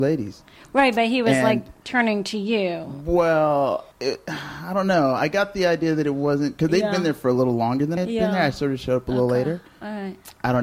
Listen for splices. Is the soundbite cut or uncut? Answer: cut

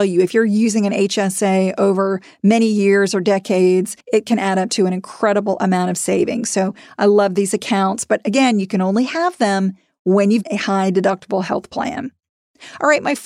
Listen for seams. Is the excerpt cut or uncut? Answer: cut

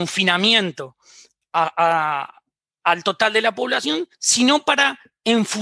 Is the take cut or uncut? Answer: cut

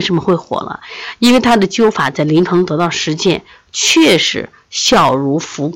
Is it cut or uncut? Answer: uncut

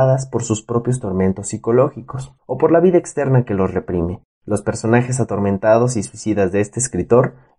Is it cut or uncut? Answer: cut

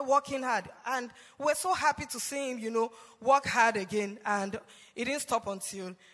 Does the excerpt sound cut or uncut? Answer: uncut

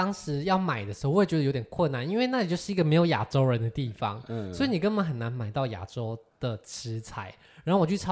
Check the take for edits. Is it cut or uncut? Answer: uncut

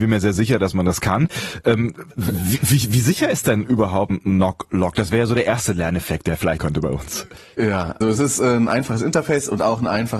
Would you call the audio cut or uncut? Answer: cut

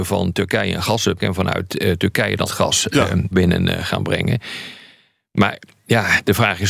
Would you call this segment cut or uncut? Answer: cut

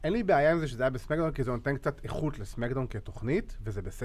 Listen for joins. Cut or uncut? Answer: uncut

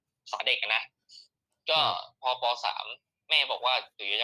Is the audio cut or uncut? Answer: uncut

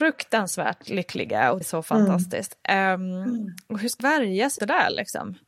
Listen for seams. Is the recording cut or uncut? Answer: cut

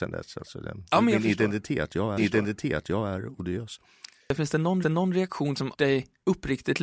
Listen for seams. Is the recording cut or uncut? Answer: cut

